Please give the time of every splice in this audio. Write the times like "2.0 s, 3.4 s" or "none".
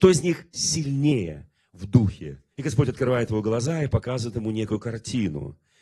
2.5 s